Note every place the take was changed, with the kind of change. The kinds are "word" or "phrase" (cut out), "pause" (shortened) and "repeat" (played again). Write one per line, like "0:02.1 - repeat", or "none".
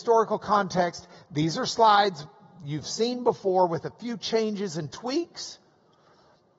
none